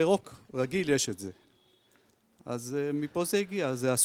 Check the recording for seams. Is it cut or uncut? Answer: uncut